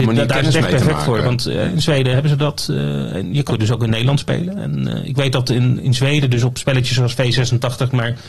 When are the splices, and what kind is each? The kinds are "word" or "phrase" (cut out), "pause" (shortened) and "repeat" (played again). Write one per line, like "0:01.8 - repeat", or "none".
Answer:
0:03.5 - word
0:05.8 - word